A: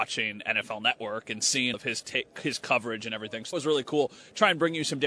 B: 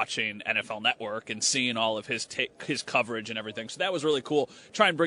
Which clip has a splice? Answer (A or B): A